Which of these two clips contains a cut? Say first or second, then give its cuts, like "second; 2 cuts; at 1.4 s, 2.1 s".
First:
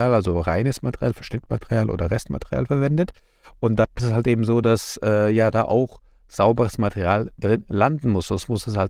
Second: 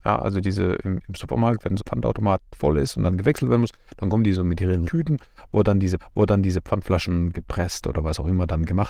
second; 3 cuts; at 1.8 s, 4.8 s, 6.0 s